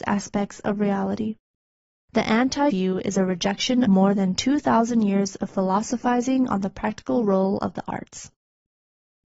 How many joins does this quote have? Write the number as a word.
two